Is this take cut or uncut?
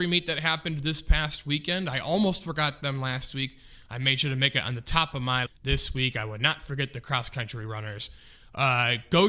cut